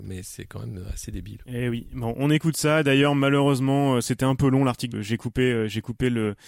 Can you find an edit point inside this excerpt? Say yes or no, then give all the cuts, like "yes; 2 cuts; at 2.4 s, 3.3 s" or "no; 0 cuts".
yes; 1 cut; at 4.9 s